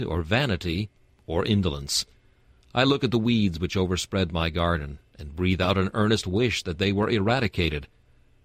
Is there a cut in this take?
no; 0 cuts

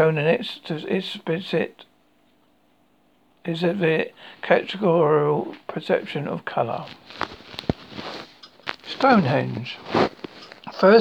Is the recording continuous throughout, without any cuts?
yes; 0 cuts

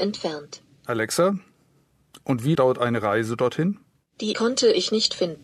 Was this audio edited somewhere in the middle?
yes; 2 cuts; at 2.5 s, 4.3 s

